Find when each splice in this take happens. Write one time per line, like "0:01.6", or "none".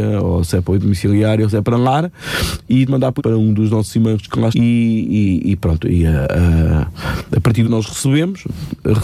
0:02.9
0:03.2
0:04.5
0:07.6